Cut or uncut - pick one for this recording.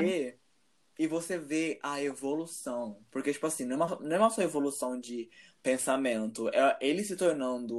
uncut